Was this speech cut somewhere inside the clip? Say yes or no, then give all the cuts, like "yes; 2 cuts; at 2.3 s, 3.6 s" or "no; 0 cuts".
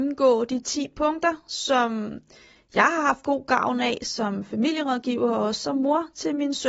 no; 0 cuts